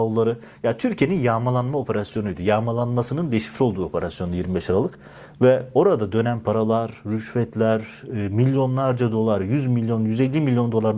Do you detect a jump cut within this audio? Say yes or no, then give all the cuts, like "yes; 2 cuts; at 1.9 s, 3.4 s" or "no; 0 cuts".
no; 0 cuts